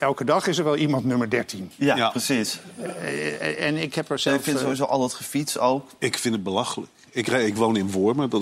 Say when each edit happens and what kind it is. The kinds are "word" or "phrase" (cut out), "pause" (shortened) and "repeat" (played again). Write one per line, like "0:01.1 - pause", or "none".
none